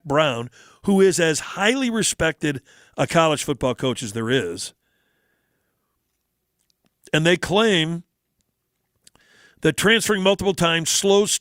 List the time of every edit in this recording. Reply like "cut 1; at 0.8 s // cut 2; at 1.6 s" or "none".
none